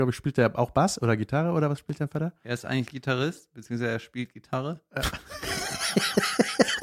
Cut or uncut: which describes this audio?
uncut